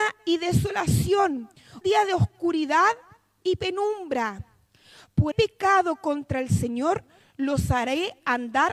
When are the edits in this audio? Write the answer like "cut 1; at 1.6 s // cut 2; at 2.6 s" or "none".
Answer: cut 1; at 1.8 s // cut 2; at 5.3 s